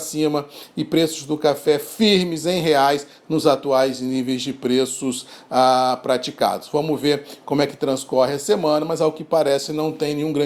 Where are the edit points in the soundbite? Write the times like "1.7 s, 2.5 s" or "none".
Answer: none